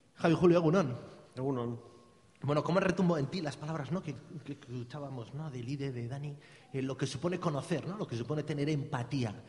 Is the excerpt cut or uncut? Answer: uncut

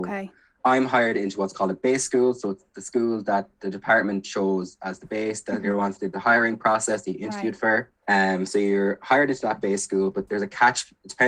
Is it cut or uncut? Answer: cut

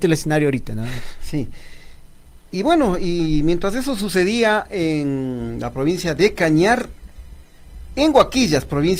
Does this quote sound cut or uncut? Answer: uncut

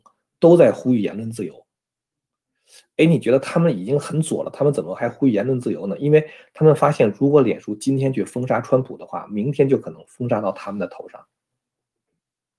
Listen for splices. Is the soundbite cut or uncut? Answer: uncut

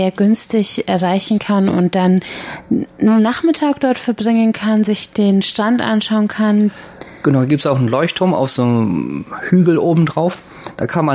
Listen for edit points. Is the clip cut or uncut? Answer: uncut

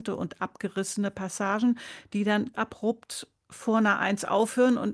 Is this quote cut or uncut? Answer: cut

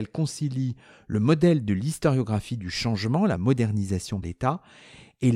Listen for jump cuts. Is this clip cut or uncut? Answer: cut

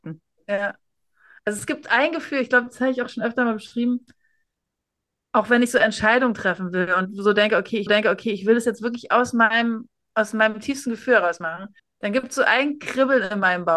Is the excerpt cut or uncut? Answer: cut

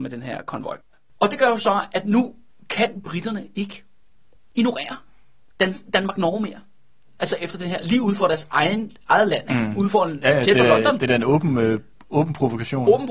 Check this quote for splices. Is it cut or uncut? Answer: uncut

